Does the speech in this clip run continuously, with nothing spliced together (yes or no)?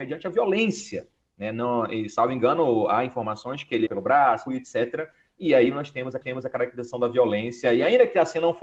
no